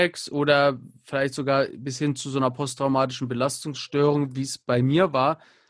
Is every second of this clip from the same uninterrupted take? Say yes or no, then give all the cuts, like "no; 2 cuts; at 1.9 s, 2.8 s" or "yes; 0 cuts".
yes; 0 cuts